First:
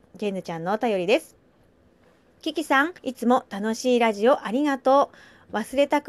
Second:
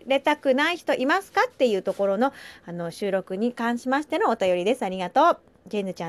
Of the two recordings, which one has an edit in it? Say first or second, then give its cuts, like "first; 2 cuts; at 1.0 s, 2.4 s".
first; 1 cut; at 3.0 s